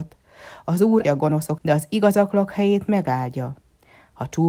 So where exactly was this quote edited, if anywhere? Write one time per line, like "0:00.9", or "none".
0:01.0
0:01.6